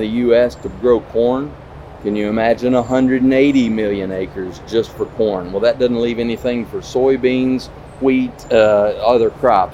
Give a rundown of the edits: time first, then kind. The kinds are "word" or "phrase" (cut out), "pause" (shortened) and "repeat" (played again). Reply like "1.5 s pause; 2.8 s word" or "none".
none